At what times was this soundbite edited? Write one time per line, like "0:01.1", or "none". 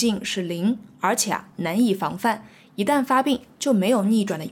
none